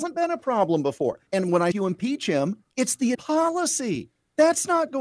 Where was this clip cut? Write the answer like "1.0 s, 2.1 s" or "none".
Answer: 1.3 s, 1.7 s, 2.7 s, 3.1 s